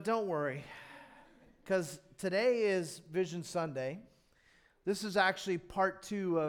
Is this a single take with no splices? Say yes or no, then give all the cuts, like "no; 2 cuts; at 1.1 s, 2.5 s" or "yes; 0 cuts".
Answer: yes; 0 cuts